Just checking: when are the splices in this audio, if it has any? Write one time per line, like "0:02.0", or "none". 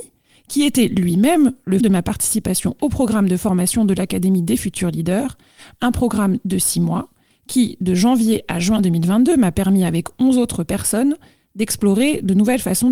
0:01.8